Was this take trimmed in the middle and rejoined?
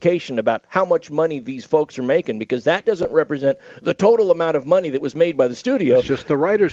no; 0 cuts

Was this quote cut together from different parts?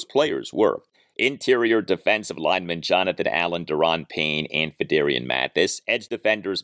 no; 0 cuts

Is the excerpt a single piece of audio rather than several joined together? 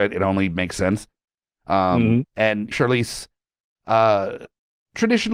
no; 1 cut; at 2.7 s

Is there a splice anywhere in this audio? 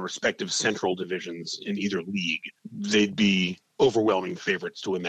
yes; 1 cut; at 2.6 s

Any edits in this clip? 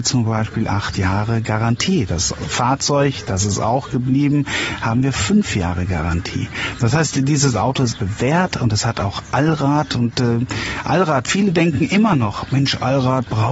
yes; 1 cut; at 7.9 s

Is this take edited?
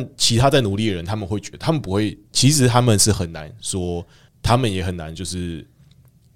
yes; 1 cut; at 4.3 s

